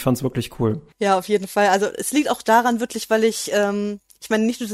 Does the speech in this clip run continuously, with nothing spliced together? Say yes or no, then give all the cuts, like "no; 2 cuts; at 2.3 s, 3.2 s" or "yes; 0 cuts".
no; 1 cut; at 0.9 s